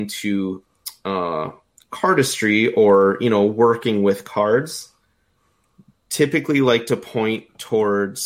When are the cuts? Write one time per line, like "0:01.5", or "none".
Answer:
none